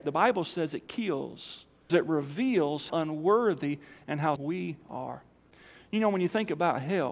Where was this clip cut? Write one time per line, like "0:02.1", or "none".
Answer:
0:01.9
0:02.9
0:04.4
0:04.8